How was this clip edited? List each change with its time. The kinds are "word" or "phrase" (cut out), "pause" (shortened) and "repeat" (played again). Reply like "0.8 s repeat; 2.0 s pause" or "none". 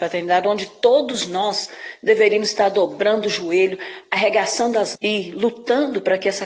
4.9 s word